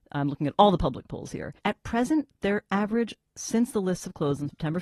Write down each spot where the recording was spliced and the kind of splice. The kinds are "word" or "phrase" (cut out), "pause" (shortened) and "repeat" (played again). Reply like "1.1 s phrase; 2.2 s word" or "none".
1.6 s pause